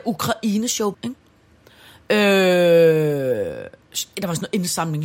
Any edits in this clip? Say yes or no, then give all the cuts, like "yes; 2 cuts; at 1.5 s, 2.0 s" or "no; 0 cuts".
yes; 1 cut; at 0.9 s